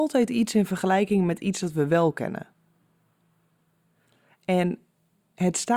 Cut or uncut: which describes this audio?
uncut